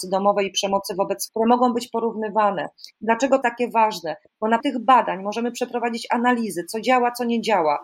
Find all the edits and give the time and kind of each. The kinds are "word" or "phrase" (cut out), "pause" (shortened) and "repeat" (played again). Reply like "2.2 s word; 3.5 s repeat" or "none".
1.3 s word; 3.4 s word; 4.6 s word